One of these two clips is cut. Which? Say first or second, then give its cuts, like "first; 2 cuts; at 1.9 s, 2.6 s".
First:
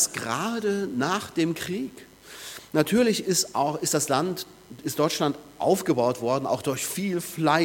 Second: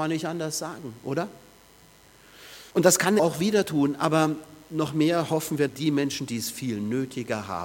second; 3 cuts; at 2.7 s, 3.2 s, 5.7 s